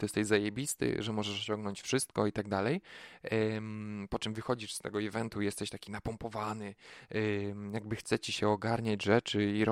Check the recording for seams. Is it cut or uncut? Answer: uncut